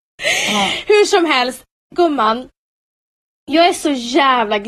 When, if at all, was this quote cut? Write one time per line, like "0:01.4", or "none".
none